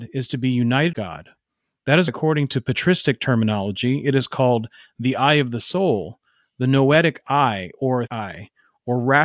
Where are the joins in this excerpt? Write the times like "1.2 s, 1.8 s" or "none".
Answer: 0.9 s, 2.1 s, 8.1 s